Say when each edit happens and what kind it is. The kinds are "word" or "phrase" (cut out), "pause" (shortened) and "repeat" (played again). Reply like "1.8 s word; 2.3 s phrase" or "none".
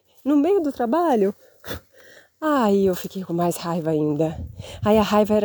none